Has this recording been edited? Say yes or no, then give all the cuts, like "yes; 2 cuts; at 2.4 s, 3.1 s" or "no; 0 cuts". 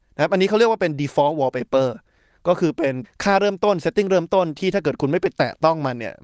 no; 0 cuts